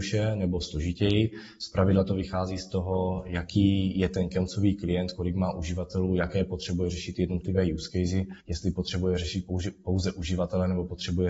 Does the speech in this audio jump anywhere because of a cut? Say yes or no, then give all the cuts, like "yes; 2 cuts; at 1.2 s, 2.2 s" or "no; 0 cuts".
yes; 1 cut; at 8.4 s